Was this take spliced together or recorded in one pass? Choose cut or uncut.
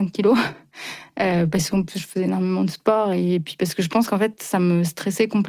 uncut